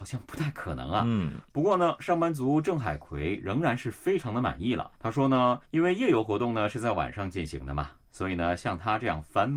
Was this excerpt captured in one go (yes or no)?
no